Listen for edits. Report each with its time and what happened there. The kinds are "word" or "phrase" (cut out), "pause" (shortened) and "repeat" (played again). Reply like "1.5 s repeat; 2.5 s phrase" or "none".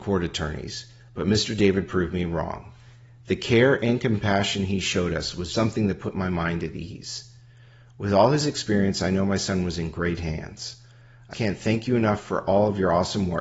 5.5 s word; 11.3 s word